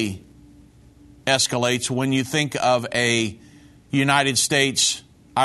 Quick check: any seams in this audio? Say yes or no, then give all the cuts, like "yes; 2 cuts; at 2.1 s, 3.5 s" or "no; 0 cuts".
no; 0 cuts